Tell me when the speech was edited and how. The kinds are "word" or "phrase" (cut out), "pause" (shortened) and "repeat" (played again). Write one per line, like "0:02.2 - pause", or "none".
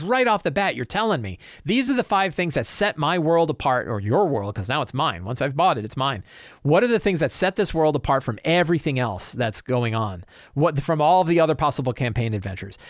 none